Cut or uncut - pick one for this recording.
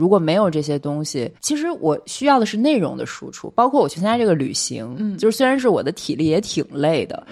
cut